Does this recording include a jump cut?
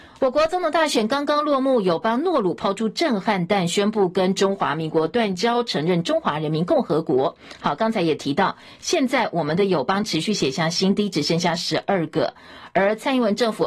no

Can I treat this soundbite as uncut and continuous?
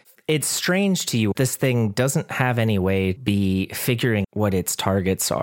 no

